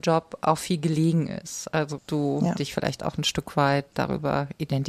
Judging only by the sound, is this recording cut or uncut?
cut